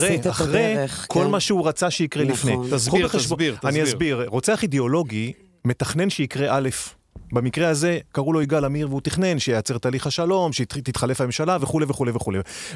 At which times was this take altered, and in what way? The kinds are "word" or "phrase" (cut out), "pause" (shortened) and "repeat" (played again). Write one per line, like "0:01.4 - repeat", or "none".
none